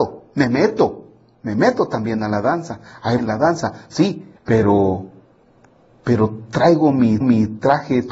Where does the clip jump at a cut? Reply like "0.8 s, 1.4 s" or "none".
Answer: 3.2 s, 4.4 s, 7.2 s